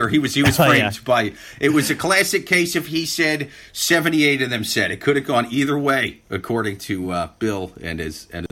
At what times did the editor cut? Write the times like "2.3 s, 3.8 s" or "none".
none